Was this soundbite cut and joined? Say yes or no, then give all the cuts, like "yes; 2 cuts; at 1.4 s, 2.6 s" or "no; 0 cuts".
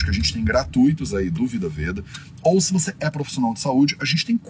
no; 0 cuts